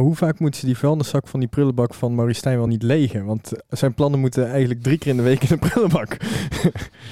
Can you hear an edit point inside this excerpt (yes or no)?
no